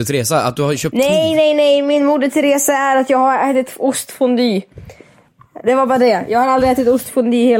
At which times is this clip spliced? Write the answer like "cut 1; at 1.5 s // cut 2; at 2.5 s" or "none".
none